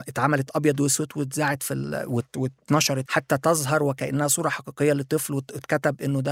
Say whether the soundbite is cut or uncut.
cut